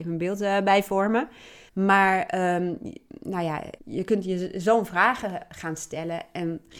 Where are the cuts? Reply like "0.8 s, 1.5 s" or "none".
1.7 s, 3.8 s

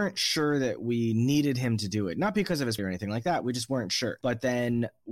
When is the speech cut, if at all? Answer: 2.8 s

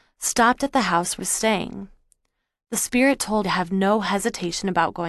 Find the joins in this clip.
1.2 s, 3.4 s

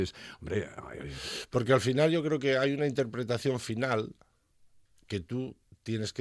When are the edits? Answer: none

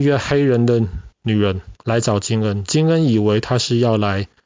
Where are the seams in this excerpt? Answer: 1.1 s, 1.8 s

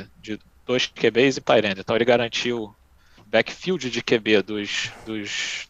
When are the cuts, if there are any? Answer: 1.4 s, 3.2 s

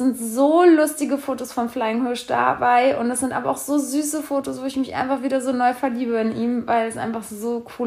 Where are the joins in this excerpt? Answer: none

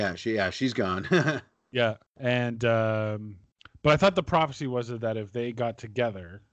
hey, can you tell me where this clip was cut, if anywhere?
2.1 s, 3.5 s

